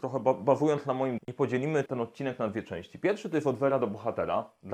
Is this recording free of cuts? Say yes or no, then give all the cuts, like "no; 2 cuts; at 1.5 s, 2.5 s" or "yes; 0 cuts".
no; 2 cuts; at 1.2 s, 1.9 s